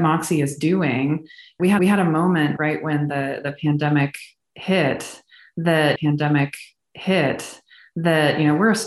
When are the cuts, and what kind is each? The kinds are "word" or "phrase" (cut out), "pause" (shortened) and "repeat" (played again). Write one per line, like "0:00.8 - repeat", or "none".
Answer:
0:01.8 - repeat
0:02.6 - word
0:06.0 - repeat